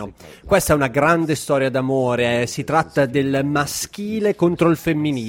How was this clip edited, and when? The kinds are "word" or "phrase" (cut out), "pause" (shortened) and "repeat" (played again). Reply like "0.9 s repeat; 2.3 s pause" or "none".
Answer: none